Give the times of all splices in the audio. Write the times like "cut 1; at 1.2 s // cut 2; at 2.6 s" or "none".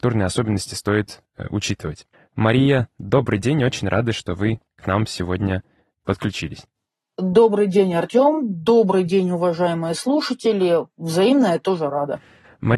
cut 1; at 2.1 s